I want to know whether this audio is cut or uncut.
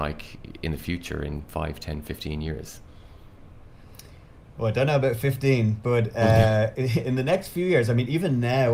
cut